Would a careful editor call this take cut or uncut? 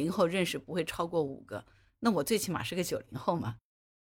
uncut